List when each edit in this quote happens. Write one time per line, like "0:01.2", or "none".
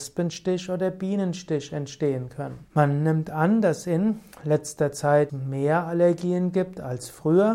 0:02.7
0:05.3